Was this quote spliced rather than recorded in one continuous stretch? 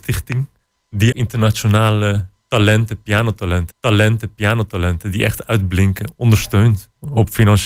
yes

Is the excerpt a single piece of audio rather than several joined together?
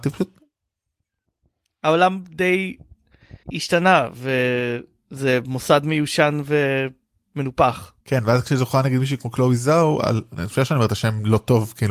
no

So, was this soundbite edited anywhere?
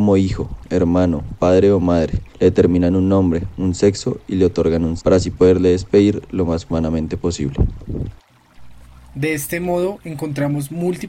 yes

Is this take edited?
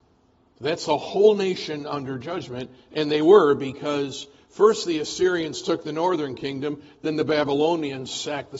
no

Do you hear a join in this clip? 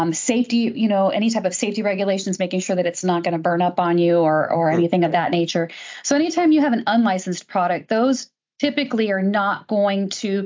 no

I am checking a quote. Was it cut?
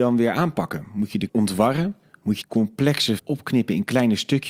yes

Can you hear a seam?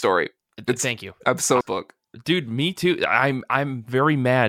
yes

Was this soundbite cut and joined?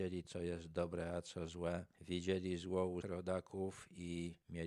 yes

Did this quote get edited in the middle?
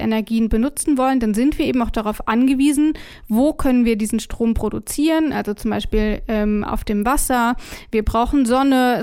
no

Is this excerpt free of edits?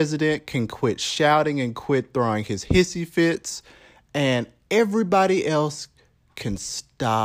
yes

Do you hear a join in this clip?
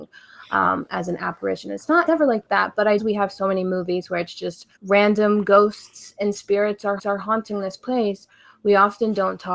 yes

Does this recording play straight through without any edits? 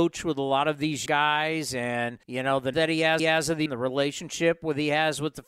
no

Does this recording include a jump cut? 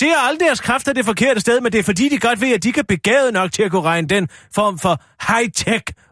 no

